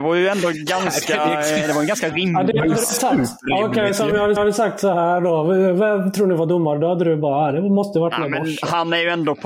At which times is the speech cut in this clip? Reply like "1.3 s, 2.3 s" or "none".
4.4 s